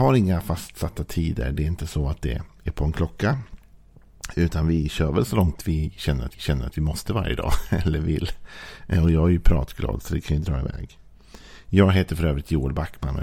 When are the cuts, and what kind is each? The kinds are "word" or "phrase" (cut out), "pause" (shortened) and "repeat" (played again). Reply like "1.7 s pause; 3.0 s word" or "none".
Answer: 6.3 s repeat